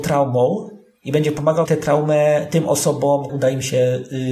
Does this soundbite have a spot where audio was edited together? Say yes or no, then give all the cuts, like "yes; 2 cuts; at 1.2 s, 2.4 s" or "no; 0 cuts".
yes; 2 cuts; at 1.7 s, 3.3 s